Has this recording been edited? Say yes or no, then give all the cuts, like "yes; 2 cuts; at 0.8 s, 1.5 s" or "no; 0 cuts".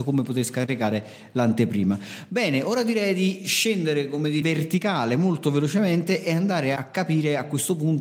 yes; 2 cuts; at 4.4 s, 6.8 s